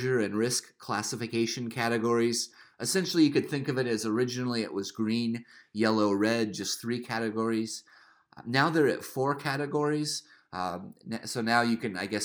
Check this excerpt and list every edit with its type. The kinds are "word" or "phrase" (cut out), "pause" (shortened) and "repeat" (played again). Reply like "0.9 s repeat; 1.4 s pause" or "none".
none